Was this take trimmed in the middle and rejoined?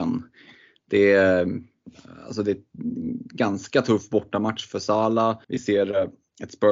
yes; 1 cut; at 5.4 s

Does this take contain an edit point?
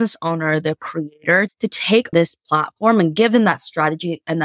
yes; 2 cuts; at 1.5 s, 2.1 s

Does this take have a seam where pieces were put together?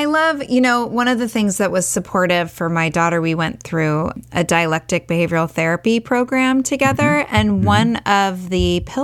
no; 0 cuts

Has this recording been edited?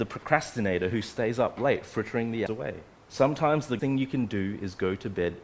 yes; 3 cuts; at 2.5 s, 3.0 s, 3.8 s

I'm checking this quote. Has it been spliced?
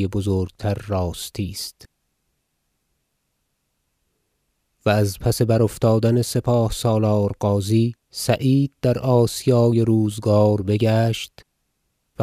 yes; 1 cut; at 8.0 s

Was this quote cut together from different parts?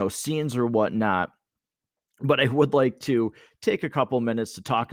no; 0 cuts

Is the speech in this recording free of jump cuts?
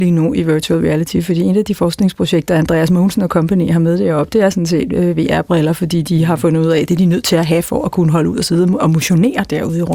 yes; 0 cuts

